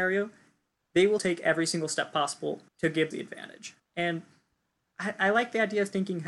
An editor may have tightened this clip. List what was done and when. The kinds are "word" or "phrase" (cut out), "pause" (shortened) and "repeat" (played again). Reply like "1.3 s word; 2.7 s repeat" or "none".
1.2 s word; 2.7 s pause; 3.1 s word; 3.8 s pause